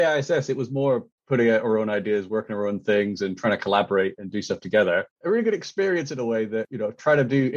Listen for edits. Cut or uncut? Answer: uncut